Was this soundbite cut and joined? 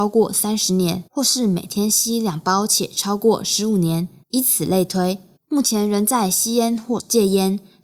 yes; 3 cuts; at 1.1 s, 4.2 s, 5.4 s

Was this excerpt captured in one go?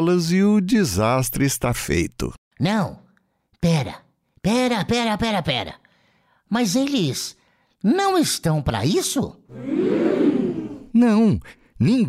yes; 0 cuts

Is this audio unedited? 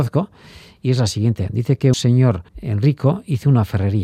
no; 2 cuts; at 1.9 s, 2.5 s

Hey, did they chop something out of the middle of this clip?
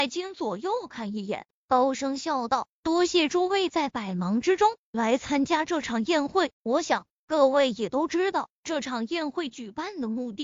yes; 1 cut; at 6.5 s

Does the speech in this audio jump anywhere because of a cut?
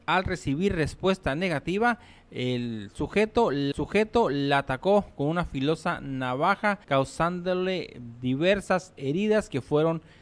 yes; 2 cuts; at 3.7 s, 6.8 s

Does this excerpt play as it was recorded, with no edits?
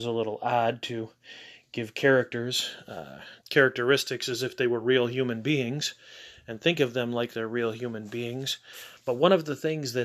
no; 1 cut; at 3.4 s

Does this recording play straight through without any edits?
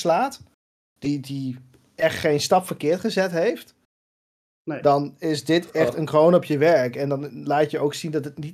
yes; 0 cuts

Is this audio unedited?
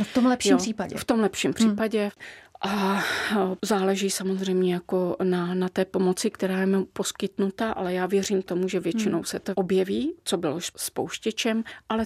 yes; 0 cuts

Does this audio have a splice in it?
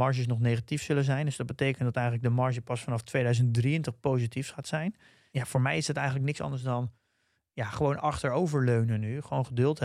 no; 0 cuts

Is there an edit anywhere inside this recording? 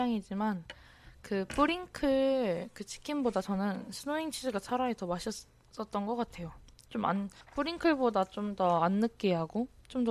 yes; 1 cut; at 7.4 s

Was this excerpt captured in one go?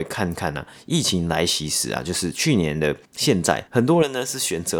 no; 2 cuts; at 3.0 s, 3.7 s

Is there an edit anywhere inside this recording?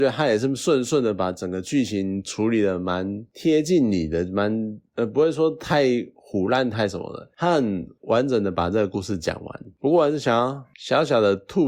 yes; 1 cut; at 6.7 s

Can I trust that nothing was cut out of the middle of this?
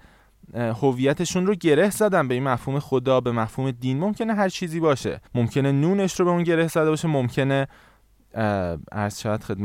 no; 1 cut; at 5.3 s

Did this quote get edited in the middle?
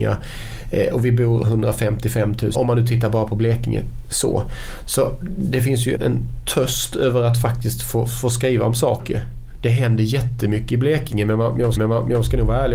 yes; 3 cuts; at 2.5 s, 6.0 s, 11.8 s

